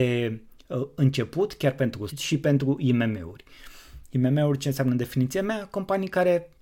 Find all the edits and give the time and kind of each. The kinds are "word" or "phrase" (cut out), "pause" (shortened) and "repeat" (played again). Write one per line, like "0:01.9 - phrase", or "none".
0:02.1 - word